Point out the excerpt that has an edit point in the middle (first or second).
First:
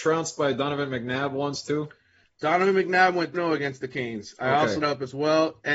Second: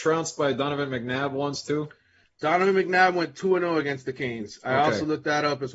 first